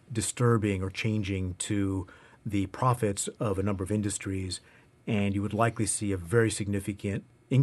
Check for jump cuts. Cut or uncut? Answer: uncut